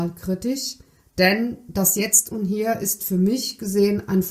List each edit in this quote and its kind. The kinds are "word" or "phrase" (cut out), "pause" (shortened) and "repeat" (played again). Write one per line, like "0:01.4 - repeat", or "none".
none

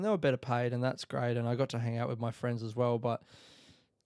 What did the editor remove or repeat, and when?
none

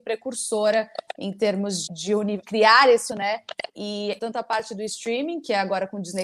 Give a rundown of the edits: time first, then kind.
0:01.9 - word
0:02.4 - word
0:03.1 - word
0:04.2 - word

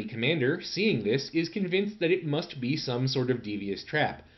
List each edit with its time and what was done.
none

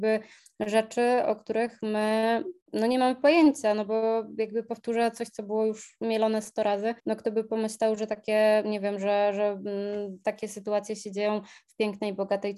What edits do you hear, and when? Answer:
0:02.6 - pause
0:07.0 - pause

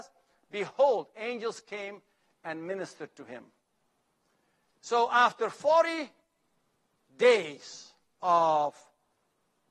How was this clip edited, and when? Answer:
none

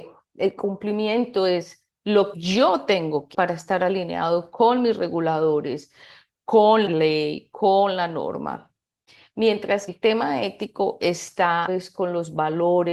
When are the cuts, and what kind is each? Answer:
0:02.3 - word
0:03.3 - word
0:06.9 - word
0:09.9 - word
0:11.7 - word

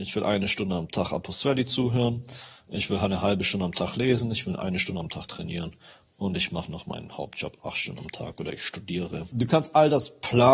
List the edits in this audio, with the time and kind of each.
none

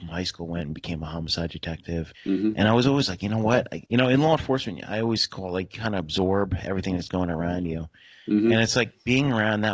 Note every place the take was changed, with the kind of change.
0:02.1 - pause
0:03.9 - pause

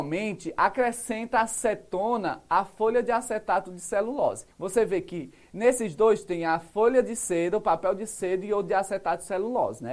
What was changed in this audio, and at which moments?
0:04.5 - pause

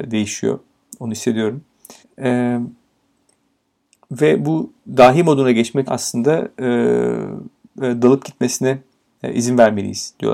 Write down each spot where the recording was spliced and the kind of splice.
0:02.0 - pause
0:04.8 - pause
0:05.9 - word
0:07.8 - word

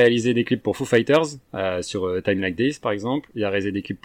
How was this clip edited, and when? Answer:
0:01.4 - pause

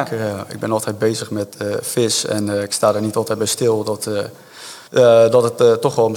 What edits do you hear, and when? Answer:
0:04.9 - pause

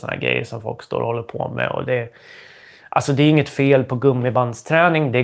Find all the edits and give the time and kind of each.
none

